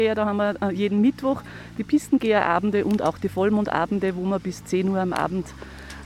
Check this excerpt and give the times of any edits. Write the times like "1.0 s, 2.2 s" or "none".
none